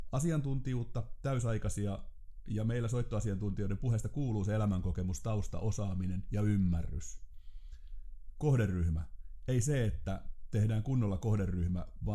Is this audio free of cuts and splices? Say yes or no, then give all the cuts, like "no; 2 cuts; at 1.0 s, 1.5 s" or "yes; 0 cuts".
yes; 0 cuts